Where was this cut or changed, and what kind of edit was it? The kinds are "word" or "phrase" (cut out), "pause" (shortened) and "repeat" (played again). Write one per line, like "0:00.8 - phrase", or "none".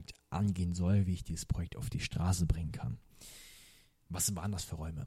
none